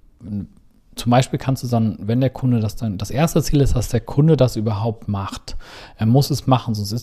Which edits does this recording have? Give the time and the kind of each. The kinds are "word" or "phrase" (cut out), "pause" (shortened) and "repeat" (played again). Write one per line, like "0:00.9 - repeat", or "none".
none